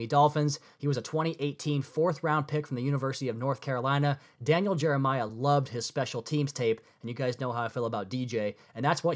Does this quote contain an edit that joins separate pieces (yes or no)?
no